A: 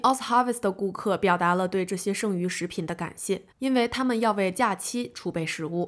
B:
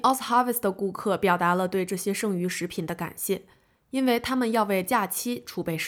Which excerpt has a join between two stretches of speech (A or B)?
A